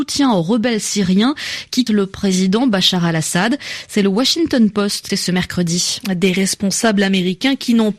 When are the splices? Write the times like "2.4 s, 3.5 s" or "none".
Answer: 1.9 s, 5.1 s